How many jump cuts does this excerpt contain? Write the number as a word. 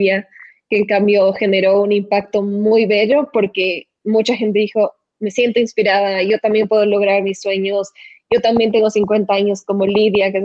zero